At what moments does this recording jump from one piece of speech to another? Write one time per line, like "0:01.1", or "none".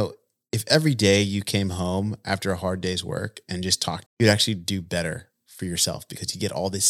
0:04.1